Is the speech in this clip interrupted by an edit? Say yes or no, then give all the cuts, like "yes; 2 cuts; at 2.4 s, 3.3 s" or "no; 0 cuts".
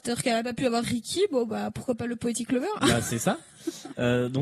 no; 0 cuts